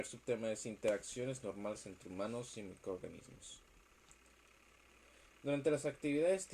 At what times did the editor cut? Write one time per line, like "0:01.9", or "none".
none